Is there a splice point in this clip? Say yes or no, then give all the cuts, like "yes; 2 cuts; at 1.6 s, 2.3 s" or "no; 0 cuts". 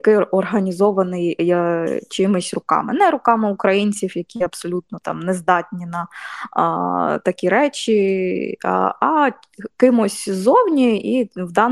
no; 0 cuts